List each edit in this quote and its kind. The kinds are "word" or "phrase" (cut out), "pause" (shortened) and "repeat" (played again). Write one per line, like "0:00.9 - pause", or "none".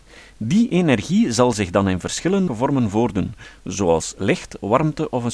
0:02.5 - word